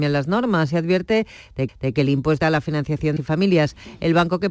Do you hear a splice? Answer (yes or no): yes